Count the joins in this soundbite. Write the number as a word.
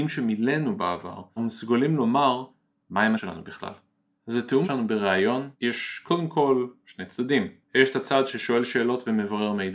four